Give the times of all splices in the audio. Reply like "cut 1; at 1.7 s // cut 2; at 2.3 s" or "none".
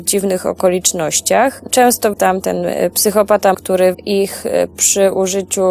cut 1; at 2.1 s // cut 2; at 3.5 s // cut 3; at 3.9 s